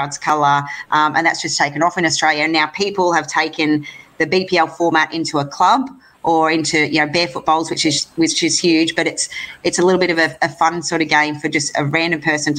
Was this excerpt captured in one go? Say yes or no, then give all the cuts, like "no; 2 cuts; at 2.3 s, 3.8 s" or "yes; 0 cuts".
yes; 0 cuts